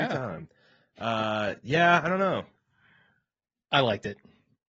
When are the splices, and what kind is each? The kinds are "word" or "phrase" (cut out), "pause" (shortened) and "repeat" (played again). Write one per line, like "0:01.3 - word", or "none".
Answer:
none